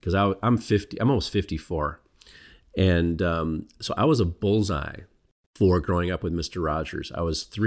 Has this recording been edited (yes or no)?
no